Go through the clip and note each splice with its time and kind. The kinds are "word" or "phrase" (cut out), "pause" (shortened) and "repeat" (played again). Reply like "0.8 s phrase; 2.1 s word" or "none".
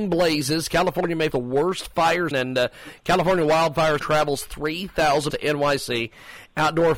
1.3 s word; 2.3 s word; 4.0 s word; 5.3 s word